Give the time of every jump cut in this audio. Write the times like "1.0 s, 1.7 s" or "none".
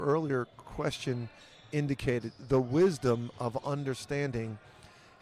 none